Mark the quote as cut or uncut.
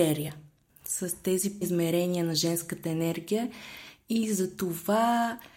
cut